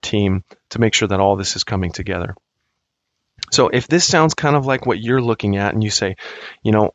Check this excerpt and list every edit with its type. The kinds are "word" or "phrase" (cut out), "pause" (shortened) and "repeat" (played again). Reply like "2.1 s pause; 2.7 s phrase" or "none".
none